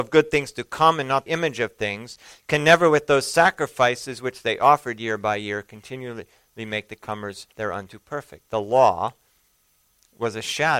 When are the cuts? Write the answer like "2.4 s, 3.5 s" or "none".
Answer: 1.3 s, 7.5 s